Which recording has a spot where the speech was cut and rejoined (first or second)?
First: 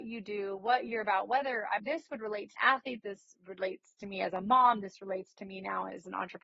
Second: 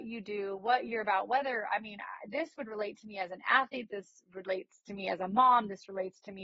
first